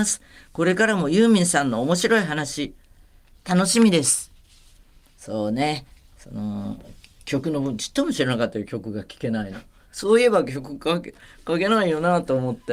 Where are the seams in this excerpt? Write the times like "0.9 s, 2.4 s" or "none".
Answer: none